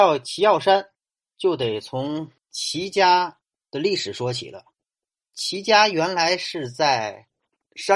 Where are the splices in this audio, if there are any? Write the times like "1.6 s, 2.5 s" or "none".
2.4 s